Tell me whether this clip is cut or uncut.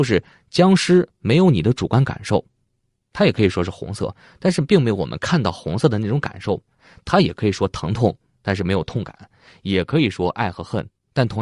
uncut